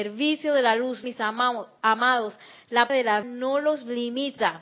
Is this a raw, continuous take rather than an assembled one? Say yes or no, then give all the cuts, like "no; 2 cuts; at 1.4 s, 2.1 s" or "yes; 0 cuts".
no; 3 cuts; at 1.0 s, 2.9 s, 3.2 s